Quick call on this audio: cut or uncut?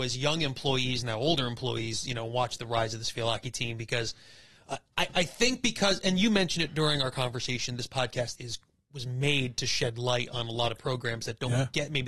cut